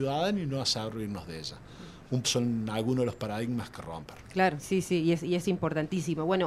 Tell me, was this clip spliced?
yes; 3 cuts; at 2.2 s, 3.7 s, 4.6 s

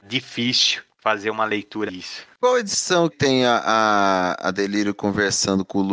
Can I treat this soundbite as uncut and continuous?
no; 2 cuts; at 1.9 s, 3.1 s

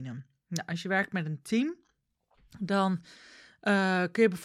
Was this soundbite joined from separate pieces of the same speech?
no; 0 cuts

